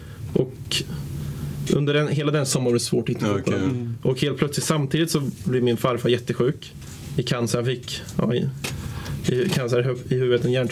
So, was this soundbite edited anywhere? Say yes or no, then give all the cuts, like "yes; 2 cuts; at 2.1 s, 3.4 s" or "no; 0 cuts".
yes; 1 cut; at 3.2 s